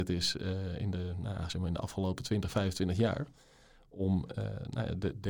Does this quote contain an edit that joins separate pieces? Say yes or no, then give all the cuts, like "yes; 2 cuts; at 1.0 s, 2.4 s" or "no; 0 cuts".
no; 0 cuts